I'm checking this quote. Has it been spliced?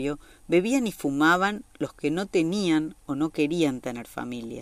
no; 0 cuts

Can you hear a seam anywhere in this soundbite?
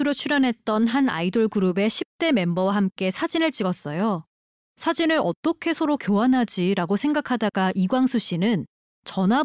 no; 0 cuts

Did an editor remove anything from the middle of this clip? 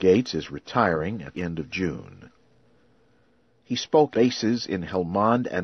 yes; 2 cuts; at 1.3 s, 4.1 s

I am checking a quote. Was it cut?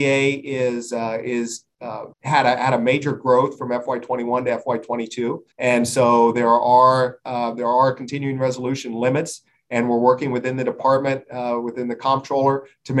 yes; 2 cuts; at 2.1 s, 5.5 s

